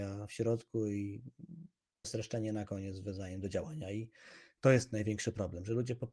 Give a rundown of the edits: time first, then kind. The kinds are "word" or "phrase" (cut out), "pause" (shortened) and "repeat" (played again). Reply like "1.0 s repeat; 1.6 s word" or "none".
2.0 s word